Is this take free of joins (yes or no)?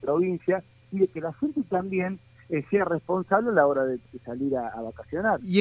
yes